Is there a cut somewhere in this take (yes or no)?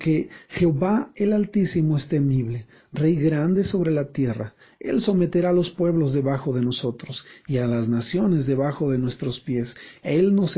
no